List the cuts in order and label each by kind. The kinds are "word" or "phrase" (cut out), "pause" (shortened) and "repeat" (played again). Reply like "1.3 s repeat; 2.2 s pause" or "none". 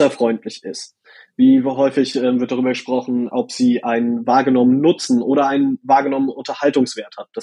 none